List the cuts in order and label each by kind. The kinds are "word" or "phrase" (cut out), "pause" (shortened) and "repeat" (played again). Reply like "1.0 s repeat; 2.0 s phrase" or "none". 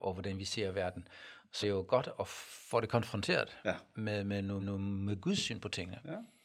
1.6 s word; 4.6 s repeat